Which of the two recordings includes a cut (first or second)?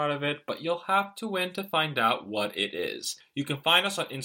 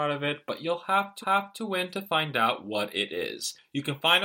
second